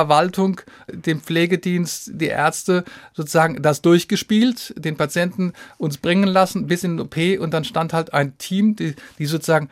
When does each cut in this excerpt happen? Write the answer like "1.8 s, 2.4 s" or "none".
none